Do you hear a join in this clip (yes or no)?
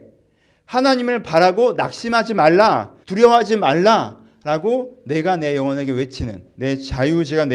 yes